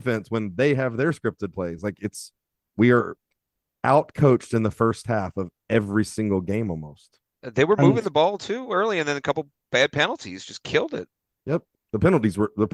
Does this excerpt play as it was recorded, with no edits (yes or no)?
yes